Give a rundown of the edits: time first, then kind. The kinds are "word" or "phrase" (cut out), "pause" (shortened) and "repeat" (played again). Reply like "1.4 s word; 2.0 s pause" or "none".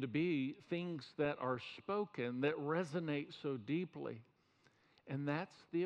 none

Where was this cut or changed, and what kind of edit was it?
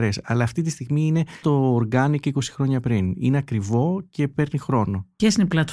1.4 s word

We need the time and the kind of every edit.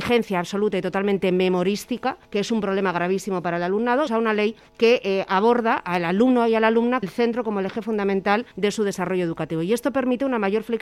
2.2 s pause; 4.1 s phrase; 4.7 s pause; 7.0 s word; 8.5 s pause

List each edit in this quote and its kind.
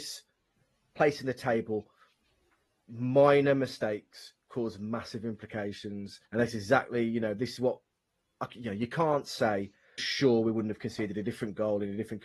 6.3 s pause; 7.6 s word; 10.0 s word

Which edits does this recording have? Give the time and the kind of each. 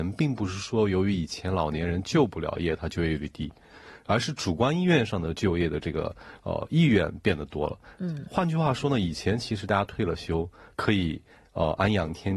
none

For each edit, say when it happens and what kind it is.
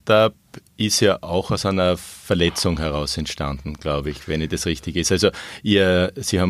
none

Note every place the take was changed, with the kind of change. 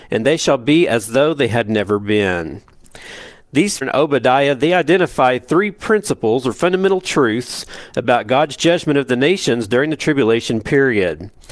3.8 s phrase

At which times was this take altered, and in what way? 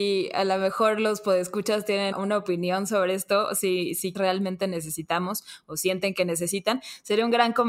2.1 s word; 4.1 s phrase

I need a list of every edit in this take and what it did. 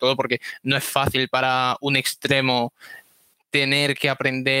none

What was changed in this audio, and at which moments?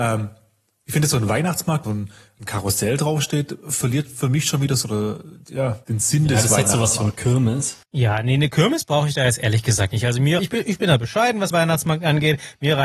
1.8 s phrase; 4.8 s phrase; 5.8 s word; 7.8 s pause; 9.9 s word; 10.4 s word; 11.5 s word

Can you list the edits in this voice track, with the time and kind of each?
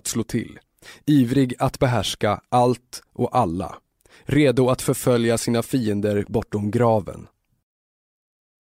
none

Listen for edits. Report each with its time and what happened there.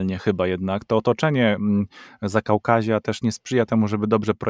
none

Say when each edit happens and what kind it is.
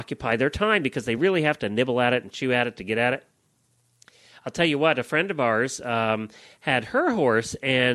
none

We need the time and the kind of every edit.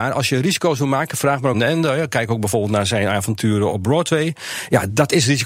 1.5 s phrase; 3.7 s word

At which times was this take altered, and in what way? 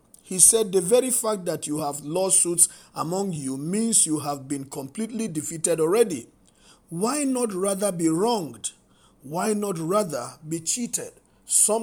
none

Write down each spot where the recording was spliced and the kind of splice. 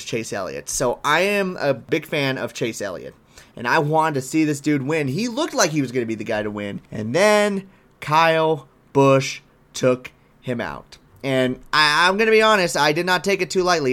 6.9 s pause

